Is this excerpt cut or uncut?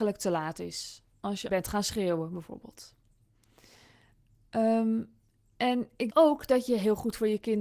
cut